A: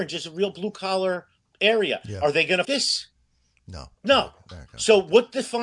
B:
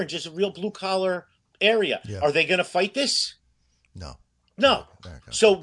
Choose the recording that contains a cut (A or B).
A